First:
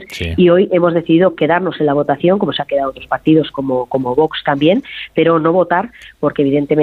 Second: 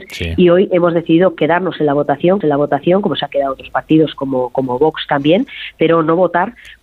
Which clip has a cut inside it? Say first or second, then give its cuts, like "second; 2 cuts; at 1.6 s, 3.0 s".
second; 1 cut; at 2.4 s